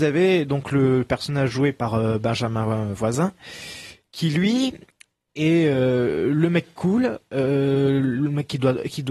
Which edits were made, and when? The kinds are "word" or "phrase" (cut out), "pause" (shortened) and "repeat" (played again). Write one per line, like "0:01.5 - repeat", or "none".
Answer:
none

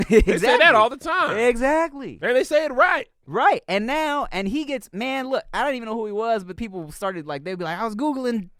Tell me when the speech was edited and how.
0:06.6 - phrase

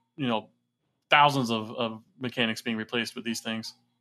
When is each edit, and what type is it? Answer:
none

